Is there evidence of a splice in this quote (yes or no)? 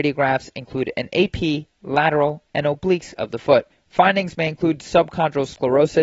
yes